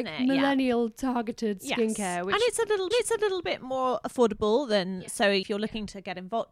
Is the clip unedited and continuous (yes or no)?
no